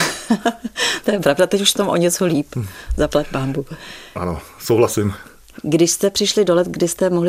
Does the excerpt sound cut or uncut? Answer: cut